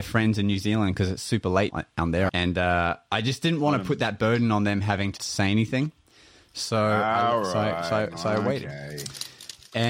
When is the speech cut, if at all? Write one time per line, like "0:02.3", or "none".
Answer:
0:01.7
0:02.3
0:05.2